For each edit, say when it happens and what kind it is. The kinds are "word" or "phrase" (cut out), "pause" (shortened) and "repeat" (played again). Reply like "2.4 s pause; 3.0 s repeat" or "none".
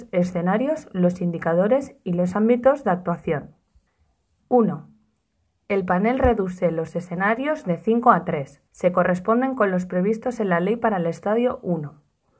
3.9 s pause; 8.7 s pause